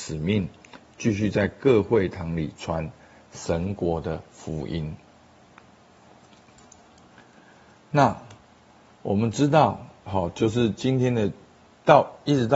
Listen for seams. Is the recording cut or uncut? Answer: uncut